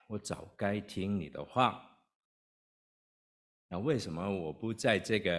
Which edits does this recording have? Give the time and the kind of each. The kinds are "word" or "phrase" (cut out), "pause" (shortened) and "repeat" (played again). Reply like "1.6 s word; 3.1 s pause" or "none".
none